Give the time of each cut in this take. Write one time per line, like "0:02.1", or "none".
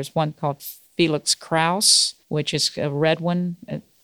0:02.2